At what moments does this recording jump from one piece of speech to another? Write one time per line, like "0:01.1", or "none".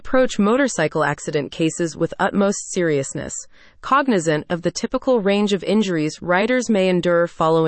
none